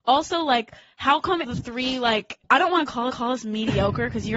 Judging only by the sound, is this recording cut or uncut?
cut